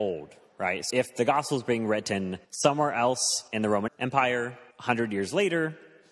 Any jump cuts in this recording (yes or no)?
yes